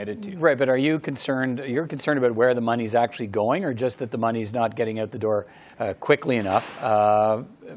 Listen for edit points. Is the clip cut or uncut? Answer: uncut